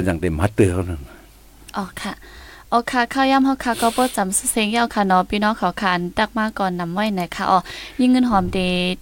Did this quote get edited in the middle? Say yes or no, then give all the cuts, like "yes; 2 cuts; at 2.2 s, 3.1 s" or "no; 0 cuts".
no; 0 cuts